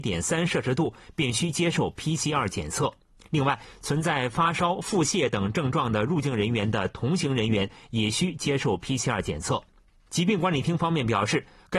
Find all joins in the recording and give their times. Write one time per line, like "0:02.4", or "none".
none